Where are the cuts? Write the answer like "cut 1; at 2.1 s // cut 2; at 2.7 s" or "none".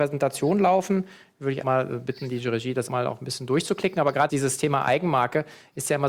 cut 1; at 1.6 s // cut 2; at 2.9 s // cut 3; at 4.3 s